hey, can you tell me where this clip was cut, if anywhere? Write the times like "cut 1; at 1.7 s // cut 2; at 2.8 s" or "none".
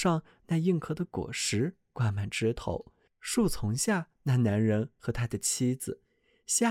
cut 1; at 3.1 s